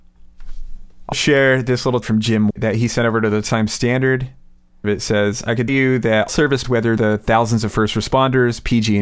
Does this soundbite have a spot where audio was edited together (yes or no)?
yes